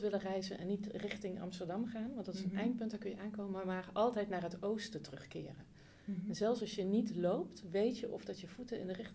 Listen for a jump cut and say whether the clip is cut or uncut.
uncut